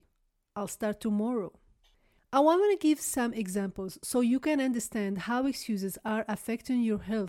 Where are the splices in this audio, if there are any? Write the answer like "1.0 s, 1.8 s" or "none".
none